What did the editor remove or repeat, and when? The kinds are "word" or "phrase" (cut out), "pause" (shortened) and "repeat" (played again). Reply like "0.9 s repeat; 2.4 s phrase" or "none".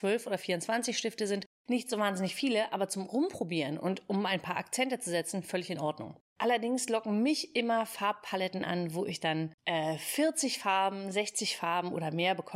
1.5 s pause; 6.3 s pause; 9.6 s pause